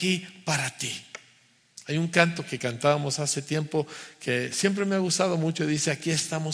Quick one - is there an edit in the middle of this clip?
no; 0 cuts

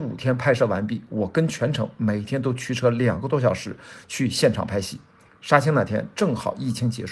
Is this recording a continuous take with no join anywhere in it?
yes; 0 cuts

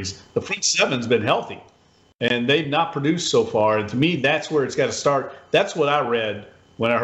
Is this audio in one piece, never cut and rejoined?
yes; 0 cuts

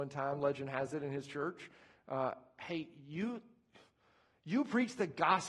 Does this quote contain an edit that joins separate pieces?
no; 0 cuts

